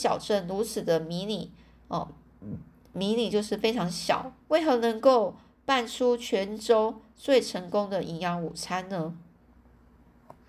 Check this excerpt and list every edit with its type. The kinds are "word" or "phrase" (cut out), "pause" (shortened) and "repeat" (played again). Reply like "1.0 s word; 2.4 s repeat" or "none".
2.8 s pause; 4.4 s pause